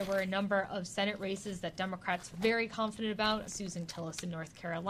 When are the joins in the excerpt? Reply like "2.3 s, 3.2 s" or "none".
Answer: 2.3 s, 3.5 s, 3.9 s

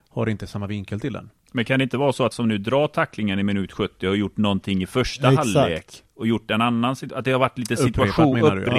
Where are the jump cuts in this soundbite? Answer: 2.3 s

